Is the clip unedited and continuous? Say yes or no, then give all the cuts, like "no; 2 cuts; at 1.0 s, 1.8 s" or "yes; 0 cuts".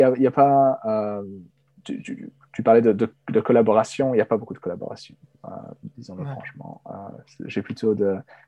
yes; 0 cuts